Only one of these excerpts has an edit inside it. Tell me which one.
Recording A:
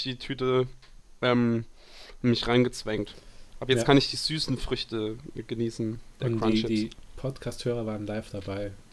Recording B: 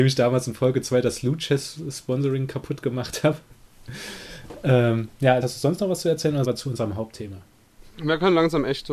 B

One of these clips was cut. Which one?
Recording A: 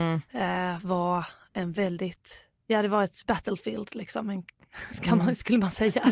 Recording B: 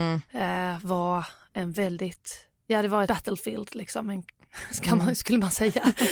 B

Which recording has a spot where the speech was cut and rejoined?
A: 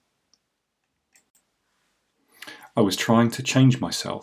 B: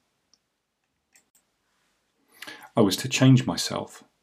B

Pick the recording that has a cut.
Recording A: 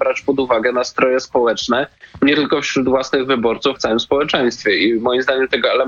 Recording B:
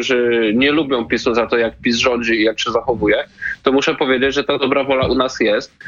A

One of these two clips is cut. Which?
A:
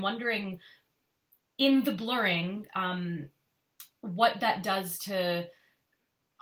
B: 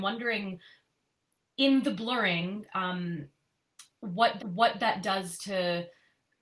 B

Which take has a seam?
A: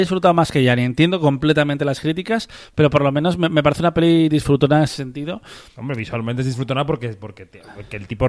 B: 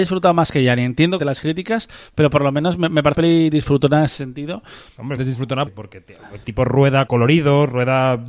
B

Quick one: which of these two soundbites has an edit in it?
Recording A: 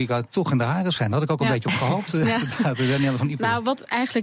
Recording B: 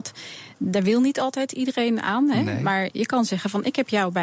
A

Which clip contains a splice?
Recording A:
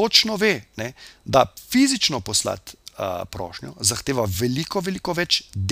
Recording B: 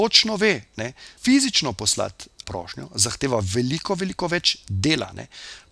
B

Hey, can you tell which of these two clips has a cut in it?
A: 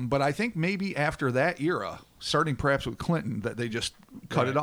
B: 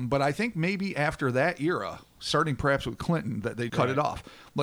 B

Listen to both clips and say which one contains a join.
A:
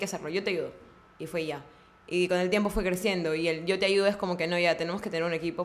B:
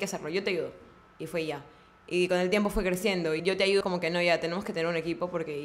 B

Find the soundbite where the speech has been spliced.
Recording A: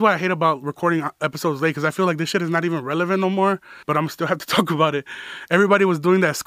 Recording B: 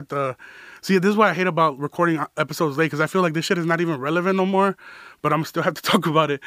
A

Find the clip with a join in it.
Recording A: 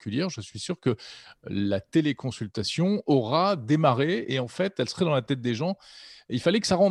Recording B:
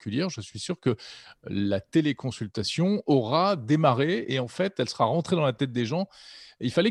A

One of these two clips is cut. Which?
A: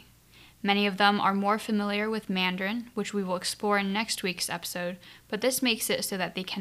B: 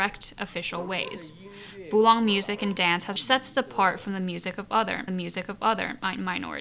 B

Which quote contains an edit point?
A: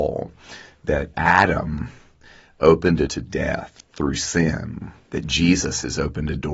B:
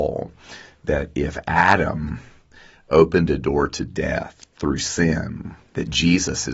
A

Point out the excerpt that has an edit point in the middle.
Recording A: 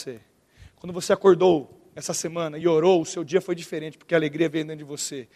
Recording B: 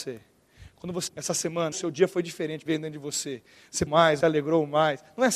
B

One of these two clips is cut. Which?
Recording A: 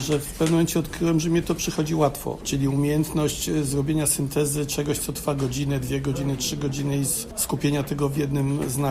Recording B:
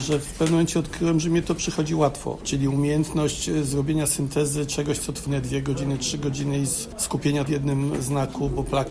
B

